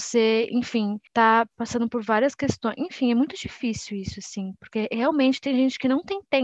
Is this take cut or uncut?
cut